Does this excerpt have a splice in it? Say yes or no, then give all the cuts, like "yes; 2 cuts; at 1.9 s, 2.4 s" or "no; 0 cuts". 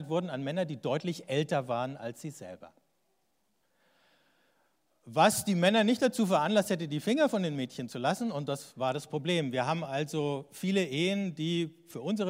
no; 0 cuts